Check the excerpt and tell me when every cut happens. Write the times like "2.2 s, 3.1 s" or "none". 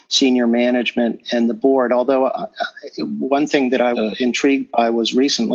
1.2 s, 3.9 s